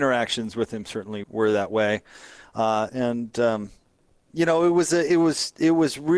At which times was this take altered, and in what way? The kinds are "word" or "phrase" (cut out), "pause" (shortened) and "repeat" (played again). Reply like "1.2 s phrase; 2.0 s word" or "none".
1.2 s word; 2.9 s word